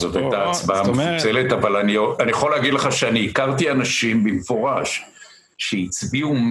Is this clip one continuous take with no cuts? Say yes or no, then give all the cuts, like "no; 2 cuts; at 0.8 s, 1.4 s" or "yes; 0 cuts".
yes; 0 cuts